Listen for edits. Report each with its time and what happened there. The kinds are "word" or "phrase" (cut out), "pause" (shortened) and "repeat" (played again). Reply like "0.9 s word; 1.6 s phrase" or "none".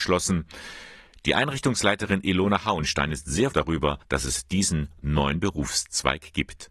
3.5 s word; 4.0 s pause